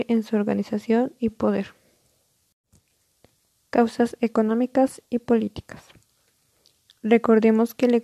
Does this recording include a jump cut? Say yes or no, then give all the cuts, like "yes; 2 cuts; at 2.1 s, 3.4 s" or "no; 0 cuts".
no; 0 cuts